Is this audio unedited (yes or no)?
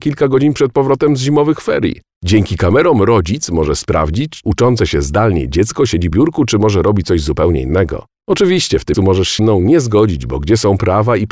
no